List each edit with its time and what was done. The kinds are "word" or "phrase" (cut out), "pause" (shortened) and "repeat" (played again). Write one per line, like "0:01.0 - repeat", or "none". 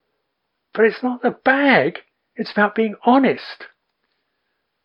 none